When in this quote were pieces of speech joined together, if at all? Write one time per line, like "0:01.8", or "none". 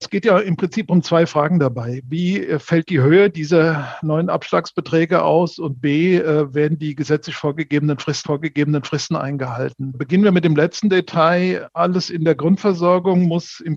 0:08.2